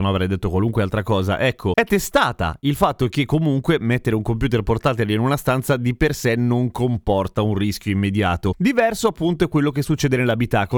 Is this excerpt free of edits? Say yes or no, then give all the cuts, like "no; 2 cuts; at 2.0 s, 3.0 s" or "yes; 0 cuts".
yes; 0 cuts